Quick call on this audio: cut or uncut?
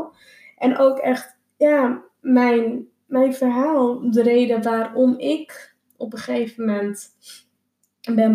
uncut